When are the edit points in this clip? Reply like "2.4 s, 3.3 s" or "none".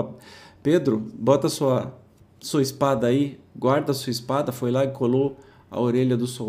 none